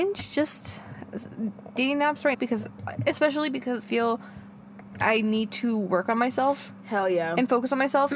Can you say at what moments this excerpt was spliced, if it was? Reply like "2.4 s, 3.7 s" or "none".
2.3 s, 3.8 s